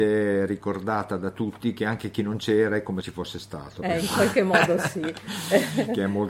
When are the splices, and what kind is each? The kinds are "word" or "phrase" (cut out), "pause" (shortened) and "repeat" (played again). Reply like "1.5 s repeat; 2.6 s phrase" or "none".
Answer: 3.0 s word